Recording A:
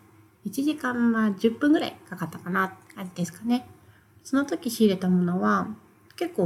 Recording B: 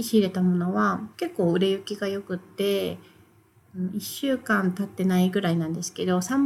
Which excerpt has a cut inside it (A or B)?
B